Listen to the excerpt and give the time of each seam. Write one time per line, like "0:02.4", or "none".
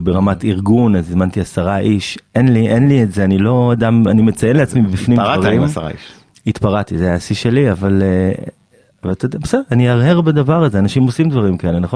none